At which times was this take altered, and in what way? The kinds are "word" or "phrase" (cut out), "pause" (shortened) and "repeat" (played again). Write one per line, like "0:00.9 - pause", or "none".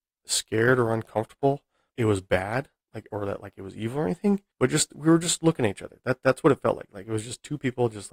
0:01.9 - phrase
0:04.5 - pause